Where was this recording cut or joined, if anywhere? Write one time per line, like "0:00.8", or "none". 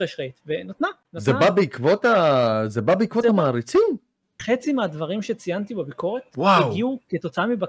none